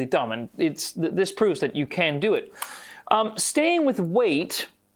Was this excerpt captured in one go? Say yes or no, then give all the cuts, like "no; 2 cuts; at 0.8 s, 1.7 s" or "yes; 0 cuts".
yes; 0 cuts